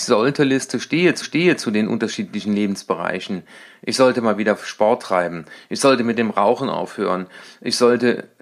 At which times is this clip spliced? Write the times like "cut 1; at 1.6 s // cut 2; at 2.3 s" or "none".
cut 1; at 1.2 s